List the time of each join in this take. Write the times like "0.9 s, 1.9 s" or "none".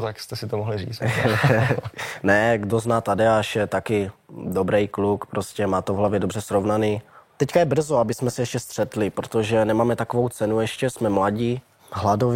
none